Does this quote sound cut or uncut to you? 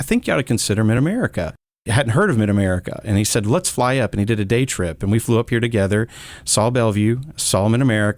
uncut